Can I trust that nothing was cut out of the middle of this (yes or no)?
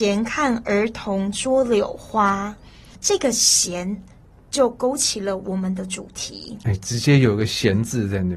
yes